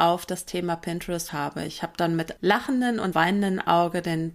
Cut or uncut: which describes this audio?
cut